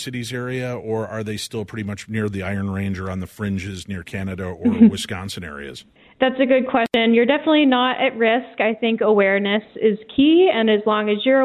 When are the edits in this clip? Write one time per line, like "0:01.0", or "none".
0:06.0